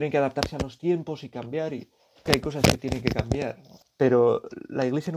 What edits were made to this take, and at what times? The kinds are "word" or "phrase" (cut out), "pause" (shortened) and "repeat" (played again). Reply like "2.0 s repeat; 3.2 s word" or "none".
2.3 s word